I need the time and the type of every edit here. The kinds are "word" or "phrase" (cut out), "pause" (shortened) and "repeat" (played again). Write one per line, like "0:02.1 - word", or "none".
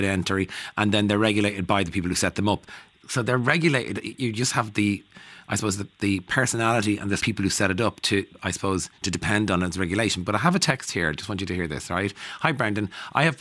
0:07.2 - phrase